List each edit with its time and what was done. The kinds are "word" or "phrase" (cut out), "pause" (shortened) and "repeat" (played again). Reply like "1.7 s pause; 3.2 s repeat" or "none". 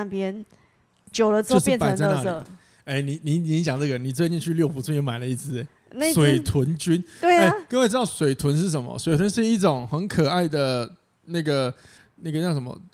none

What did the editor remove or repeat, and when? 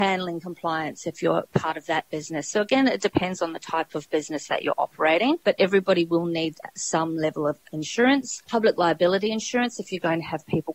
none

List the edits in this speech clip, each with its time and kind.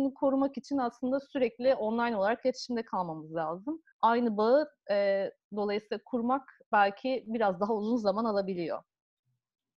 3.9 s pause

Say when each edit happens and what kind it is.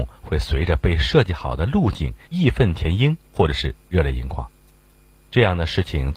2.2 s pause

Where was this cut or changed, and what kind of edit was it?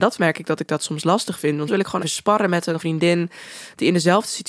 1.7 s word; 2.0 s word; 2.8 s word

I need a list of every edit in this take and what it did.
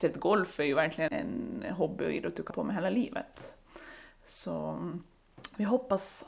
1.1 s word; 2.5 s word

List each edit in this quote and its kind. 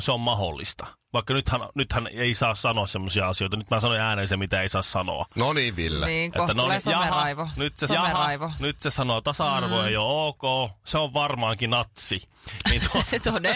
7.9 s repeat

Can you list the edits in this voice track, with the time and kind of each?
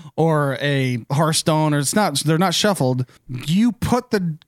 3.2 s pause

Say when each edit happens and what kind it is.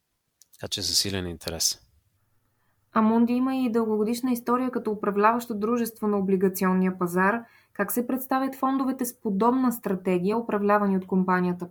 none

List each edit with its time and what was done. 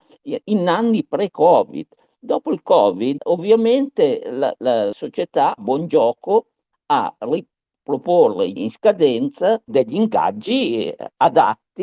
3.2 s word; 4.9 s word; 5.6 s word; 7.2 s word; 8.6 s word; 9.7 s word

